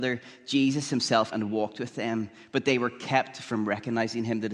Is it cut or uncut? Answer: cut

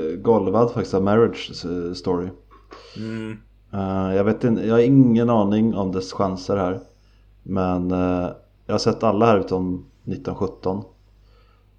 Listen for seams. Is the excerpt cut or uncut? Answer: uncut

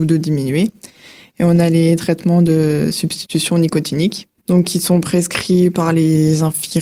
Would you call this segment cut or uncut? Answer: uncut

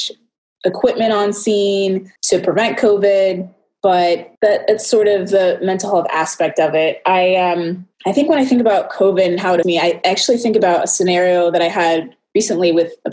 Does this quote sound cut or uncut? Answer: cut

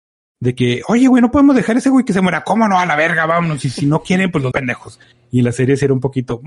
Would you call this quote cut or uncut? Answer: cut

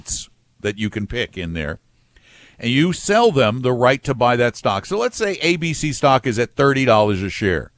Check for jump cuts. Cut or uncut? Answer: uncut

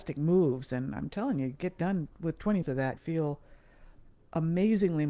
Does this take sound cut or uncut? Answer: cut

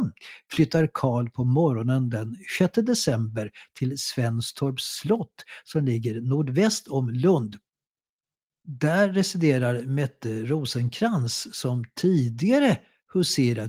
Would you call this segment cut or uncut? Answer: uncut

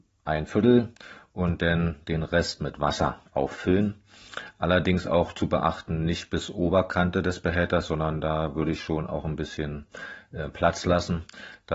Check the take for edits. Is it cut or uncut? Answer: cut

